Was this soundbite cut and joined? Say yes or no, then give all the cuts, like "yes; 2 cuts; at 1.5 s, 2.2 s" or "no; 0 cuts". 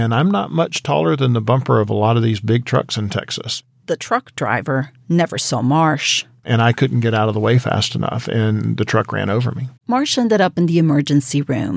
yes; 1 cut; at 9.8 s